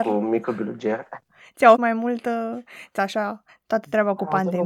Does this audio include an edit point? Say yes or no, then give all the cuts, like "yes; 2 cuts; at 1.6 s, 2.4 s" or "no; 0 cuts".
yes; 3 cuts; at 1.8 s, 3.0 s, 3.5 s